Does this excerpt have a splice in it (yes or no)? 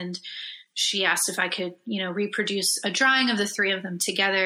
no